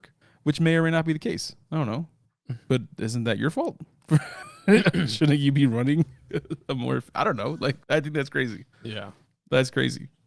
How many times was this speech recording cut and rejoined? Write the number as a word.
three